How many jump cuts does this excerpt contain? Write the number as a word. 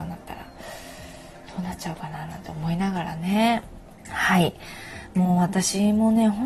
one